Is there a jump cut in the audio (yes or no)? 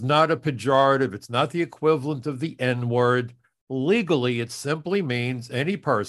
no